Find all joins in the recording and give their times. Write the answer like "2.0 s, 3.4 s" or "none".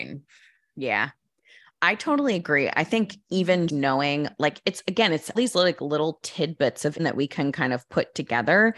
3.7 s, 5.3 s, 7.0 s

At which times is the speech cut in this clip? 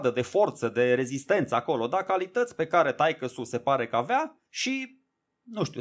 4.5 s

